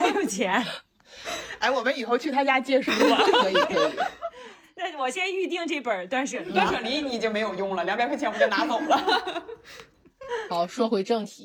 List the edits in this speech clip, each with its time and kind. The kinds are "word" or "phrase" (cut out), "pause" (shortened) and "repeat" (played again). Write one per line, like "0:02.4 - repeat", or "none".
none